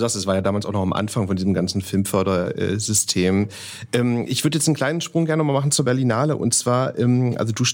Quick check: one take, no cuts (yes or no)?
yes